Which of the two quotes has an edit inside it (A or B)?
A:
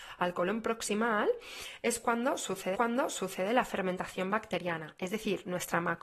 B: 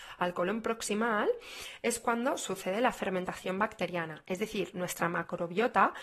A